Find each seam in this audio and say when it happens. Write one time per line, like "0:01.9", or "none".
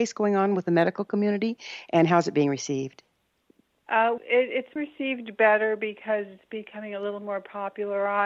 0:04.2
0:04.8